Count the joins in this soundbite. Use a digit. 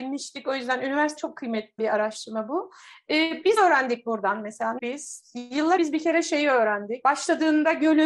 5